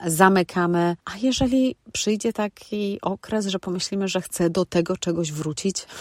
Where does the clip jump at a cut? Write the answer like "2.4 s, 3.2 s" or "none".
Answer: 1.0 s

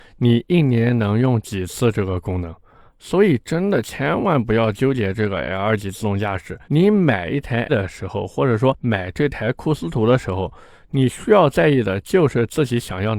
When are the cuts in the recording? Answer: 6.6 s, 7.7 s

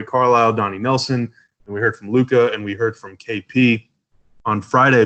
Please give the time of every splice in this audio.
none

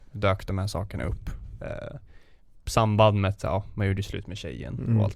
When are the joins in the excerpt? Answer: none

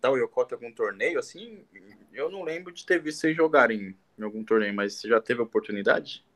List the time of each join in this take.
none

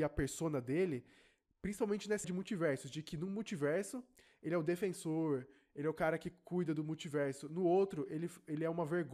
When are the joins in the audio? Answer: 2.2 s

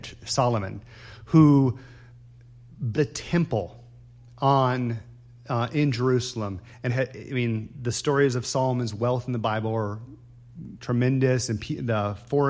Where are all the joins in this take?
2.9 s, 6.9 s

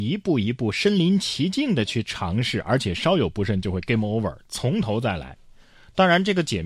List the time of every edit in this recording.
none

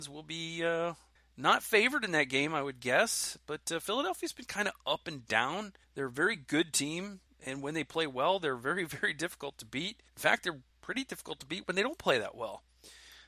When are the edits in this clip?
1.2 s, 5.8 s, 7.3 s, 10.1 s, 10.7 s

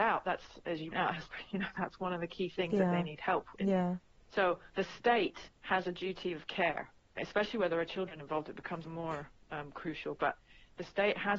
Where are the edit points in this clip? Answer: 0.9 s, 4.7 s, 5.5 s, 7.2 s, 8.8 s

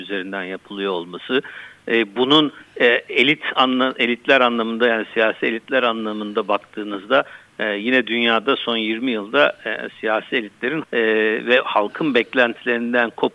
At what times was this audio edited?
10.8 s

